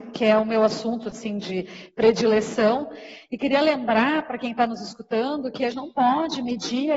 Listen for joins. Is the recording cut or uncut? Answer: cut